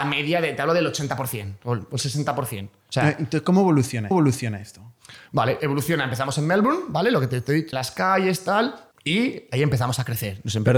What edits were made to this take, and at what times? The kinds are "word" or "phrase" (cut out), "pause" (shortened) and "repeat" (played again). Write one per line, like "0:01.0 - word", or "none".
0:04.1 - repeat
0:05.6 - word
0:07.7 - phrase
0:08.9 - pause